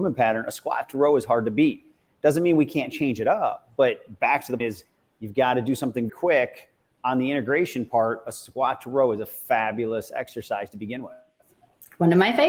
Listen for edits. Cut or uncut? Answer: cut